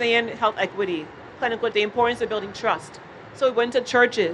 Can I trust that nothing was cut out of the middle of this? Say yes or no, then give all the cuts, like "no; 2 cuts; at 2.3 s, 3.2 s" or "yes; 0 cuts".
no; 1 cut; at 1.7 s